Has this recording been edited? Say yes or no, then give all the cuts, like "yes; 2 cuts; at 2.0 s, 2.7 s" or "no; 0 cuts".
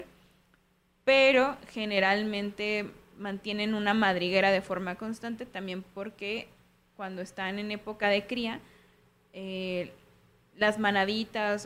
no; 0 cuts